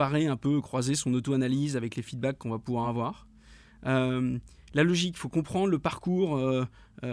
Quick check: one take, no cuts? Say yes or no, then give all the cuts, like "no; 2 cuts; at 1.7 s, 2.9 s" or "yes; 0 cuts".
yes; 0 cuts